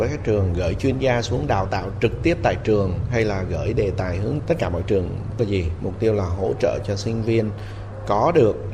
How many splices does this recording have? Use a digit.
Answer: 2